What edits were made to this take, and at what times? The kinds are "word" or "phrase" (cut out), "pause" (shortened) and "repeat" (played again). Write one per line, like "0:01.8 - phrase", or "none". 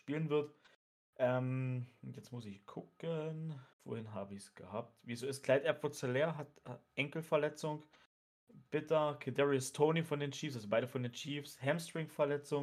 0:03.7 - pause